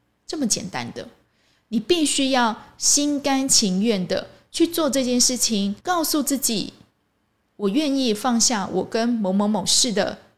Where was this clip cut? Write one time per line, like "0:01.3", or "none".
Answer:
0:05.8